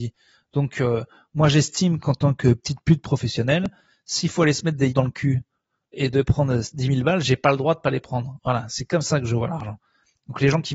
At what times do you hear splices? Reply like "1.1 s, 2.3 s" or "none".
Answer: 4.9 s, 5.9 s